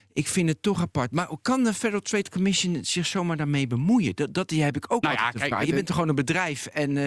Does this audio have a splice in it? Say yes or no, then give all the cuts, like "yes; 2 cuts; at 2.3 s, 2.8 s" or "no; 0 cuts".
no; 0 cuts